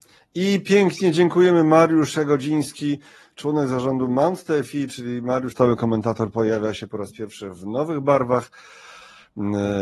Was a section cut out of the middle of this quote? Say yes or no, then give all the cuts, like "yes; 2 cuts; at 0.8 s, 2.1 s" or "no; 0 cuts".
yes; 1 cut; at 5.5 s